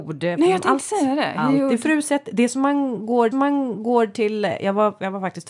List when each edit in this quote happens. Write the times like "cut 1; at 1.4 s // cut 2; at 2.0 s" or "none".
cut 1; at 3.3 s